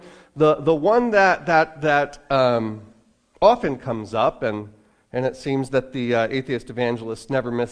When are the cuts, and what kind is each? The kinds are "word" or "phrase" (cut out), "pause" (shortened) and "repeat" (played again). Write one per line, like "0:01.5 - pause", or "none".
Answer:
none